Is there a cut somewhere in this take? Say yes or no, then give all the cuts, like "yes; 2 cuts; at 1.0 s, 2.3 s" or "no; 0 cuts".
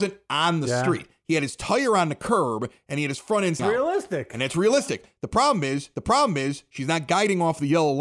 yes; 2 cuts; at 3.6 s, 5.9 s